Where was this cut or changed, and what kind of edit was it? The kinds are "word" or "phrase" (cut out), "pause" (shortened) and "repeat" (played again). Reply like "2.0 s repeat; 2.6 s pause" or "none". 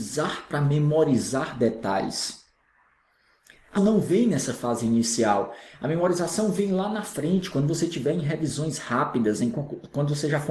3.8 s word